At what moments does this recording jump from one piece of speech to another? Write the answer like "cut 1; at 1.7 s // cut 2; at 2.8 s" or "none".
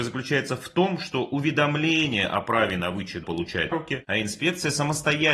cut 1; at 3.2 s // cut 2; at 3.7 s

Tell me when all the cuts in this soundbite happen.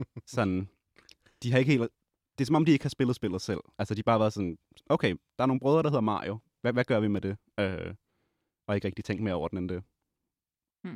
none

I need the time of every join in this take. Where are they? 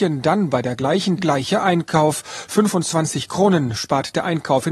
cut 1; at 1.2 s

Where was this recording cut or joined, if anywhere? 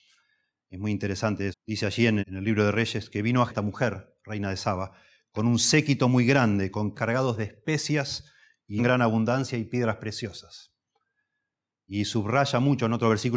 cut 1; at 1.5 s // cut 2; at 2.2 s // cut 3; at 3.5 s // cut 4; at 6.9 s // cut 5; at 8.8 s

